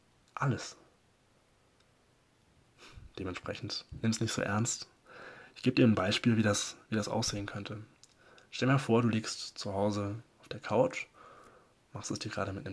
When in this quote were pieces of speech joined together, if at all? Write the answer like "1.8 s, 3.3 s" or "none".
none